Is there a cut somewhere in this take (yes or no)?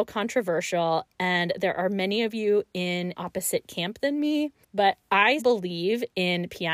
yes